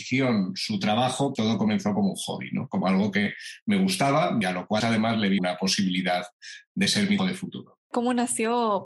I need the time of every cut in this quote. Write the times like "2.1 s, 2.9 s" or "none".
1.4 s, 4.4 s, 4.8 s, 5.4 s, 7.2 s